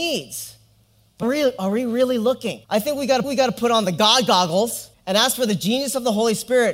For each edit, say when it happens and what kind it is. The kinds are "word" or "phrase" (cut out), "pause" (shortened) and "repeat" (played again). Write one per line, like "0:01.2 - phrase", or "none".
0:01.2 - word
0:02.6 - pause
0:03.2 - repeat
0:04.9 - pause

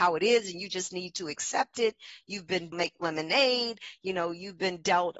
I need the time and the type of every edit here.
0:02.7 - phrase

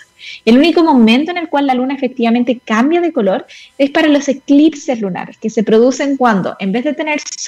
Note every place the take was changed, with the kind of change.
none

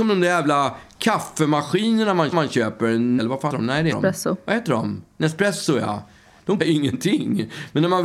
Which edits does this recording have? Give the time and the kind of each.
0:02.3 - repeat
0:03.2 - word
0:03.5 - word
0:03.9 - word
0:05.1 - pause
0:06.6 - phrase

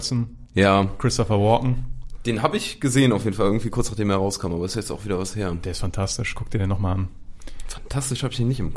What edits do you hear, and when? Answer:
none

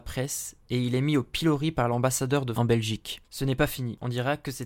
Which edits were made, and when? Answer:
0:02.5 - word

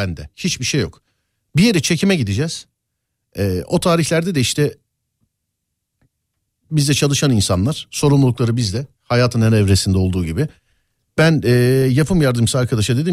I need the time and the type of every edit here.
none

